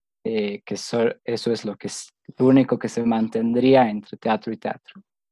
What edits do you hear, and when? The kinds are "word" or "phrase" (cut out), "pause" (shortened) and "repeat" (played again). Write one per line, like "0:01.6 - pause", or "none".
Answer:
none